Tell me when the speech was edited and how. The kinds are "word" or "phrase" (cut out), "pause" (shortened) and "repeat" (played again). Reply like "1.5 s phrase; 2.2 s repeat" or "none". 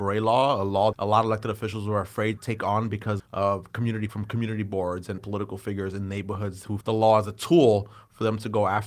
0.9 s word; 2.4 s word; 3.2 s word; 4.1 s word; 5.2 s word; 6.8 s word